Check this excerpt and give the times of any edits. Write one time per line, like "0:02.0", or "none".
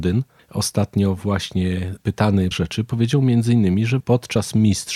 0:02.5
0:04.0